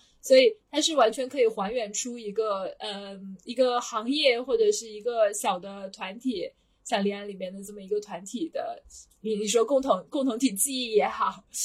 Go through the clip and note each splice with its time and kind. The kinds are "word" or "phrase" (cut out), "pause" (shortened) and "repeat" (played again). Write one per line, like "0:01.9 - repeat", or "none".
0:09.1 - word